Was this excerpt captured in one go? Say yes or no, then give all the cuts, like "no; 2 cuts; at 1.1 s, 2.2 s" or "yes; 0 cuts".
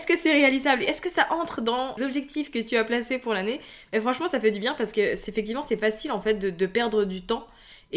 no; 1 cut; at 2.0 s